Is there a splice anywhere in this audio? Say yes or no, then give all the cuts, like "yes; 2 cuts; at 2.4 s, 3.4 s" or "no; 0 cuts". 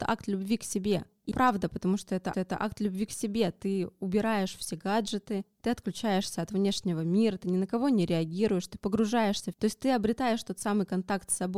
yes; 3 cuts; at 1.3 s, 2.3 s, 9.5 s